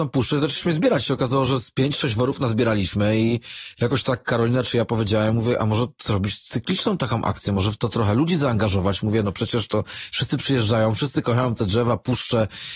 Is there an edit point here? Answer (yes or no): no